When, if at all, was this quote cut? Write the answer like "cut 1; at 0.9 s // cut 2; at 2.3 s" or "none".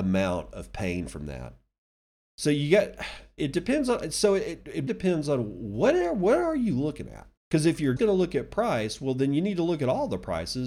cut 1; at 3.4 s // cut 2; at 4.9 s // cut 3; at 7.4 s // cut 4; at 8.0 s